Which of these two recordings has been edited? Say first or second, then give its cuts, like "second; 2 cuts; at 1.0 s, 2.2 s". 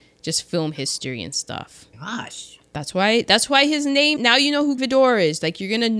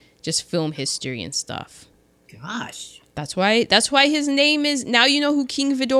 first; 3 cuts; at 1.9 s, 4.2 s, 4.8 s